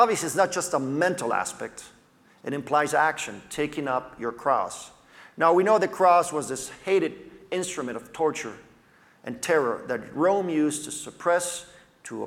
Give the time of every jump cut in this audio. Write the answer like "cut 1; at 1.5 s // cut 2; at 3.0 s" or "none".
none

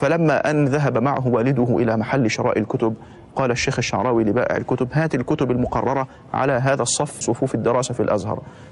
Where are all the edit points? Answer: cut 1; at 7.2 s

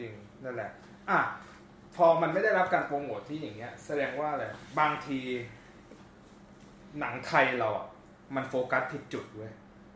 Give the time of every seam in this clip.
none

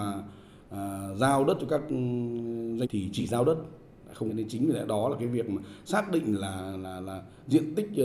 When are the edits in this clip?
cut 1; at 2.8 s // cut 2; at 4.3 s

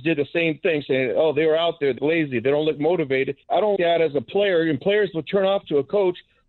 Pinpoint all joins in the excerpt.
cut 1; at 2.0 s // cut 2; at 3.4 s // cut 3; at 3.8 s

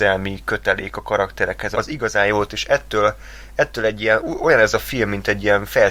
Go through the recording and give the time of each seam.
cut 1; at 1.7 s // cut 2; at 2.5 s

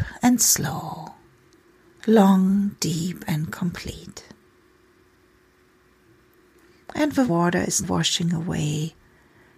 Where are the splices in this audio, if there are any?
cut 1; at 1.5 s // cut 2; at 7.3 s // cut 3; at 7.8 s

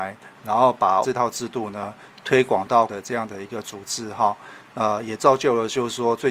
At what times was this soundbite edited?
cut 1; at 1.0 s // cut 2; at 2.9 s

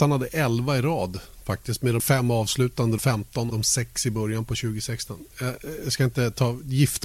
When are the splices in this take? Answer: cut 1; at 2.0 s // cut 2; at 3.0 s // cut 3; at 3.5 s

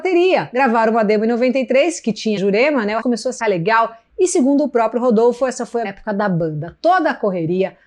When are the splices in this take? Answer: cut 1; at 2.4 s // cut 2; at 3.0 s // cut 3; at 3.4 s // cut 4; at 5.8 s

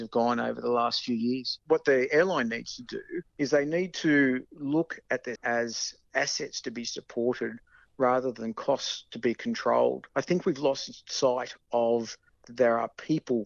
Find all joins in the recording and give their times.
cut 1; at 3.3 s // cut 2; at 5.4 s // cut 3; at 10.1 s // cut 4; at 12.4 s

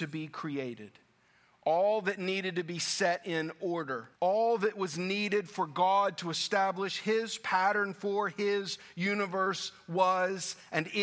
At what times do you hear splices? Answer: cut 1; at 4.1 s

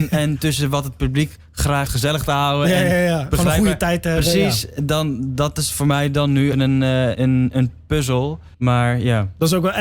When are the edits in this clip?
cut 1; at 1.9 s // cut 2; at 6.5 s // cut 3; at 7.2 s // cut 4; at 8.5 s

